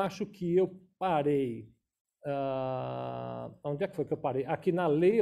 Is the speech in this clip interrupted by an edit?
no; 0 cuts

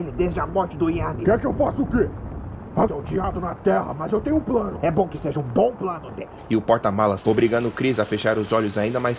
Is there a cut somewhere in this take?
yes; 3 cuts; at 2.9 s, 3.3 s, 7.3 s

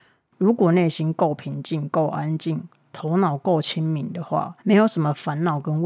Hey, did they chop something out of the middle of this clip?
yes; 1 cut; at 4.6 s

